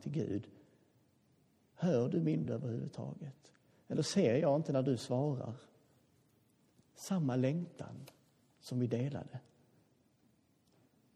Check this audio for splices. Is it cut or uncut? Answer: cut